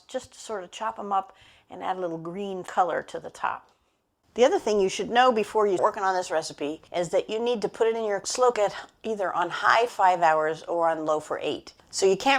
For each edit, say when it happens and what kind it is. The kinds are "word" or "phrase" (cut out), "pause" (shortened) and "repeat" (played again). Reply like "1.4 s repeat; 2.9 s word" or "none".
5.8 s word; 8.5 s phrase; 9.9 s word

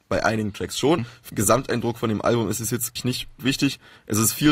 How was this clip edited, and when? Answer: 1.0 s word; 1.3 s word; 3.0 s word; 3.4 s word

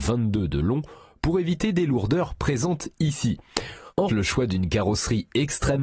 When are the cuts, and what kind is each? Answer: 4.1 s word

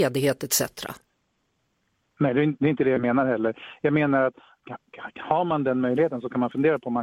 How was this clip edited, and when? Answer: none

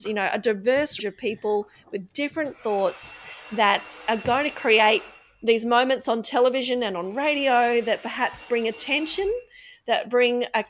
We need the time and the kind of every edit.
1.0 s word

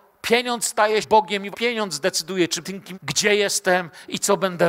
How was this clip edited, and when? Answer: 1.0 s word; 1.5 s word; 2.6 s phrase; 2.9 s word

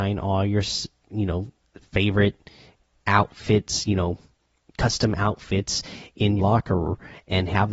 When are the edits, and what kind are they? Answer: 6.4 s word

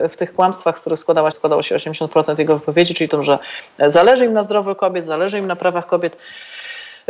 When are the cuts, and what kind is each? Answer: 1.3 s word; 3.1 s phrase

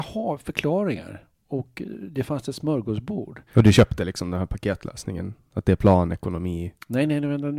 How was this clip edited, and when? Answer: 3.5 s pause

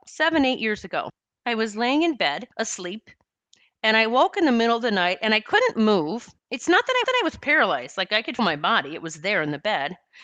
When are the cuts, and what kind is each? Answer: 1.2 s pause; 2.5 s pause; 6.4 s pause; 7.0 s repeat; 8.4 s word

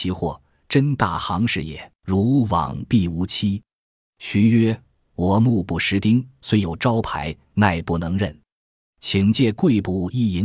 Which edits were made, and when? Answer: 2.0 s pause

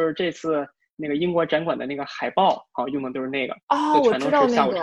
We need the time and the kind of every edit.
3.6 s pause

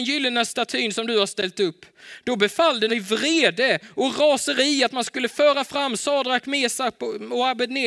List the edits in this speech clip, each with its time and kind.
2.9 s word

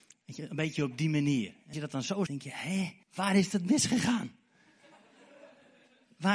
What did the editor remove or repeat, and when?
1.7 s word; 2.3 s word; 3.0 s pause

